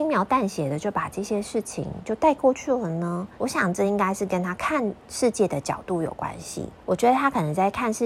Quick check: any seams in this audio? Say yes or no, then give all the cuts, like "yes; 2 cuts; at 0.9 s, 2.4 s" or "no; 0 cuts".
yes; 2 cuts; at 3.3 s, 6.8 s